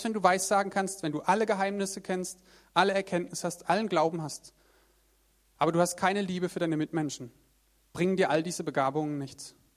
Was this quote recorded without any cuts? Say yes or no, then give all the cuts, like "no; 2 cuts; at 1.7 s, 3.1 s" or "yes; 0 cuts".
yes; 0 cuts